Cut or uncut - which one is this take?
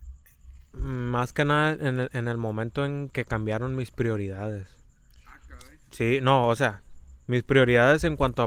uncut